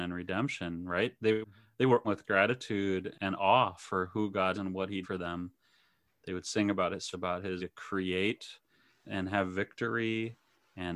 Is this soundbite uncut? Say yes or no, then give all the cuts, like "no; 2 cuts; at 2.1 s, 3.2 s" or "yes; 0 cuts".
no; 8 cuts; at 1.4 s, 2.0 s, 3.1 s, 4.5 s, 5.0 s, 7.1 s, 7.6 s, 9.0 s